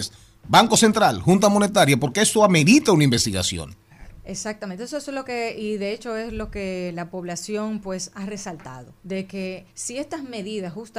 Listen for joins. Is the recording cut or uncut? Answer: cut